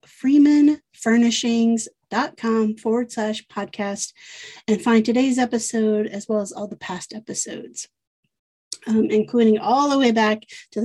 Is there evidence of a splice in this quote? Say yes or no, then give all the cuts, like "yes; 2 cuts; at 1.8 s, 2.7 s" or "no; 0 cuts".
no; 0 cuts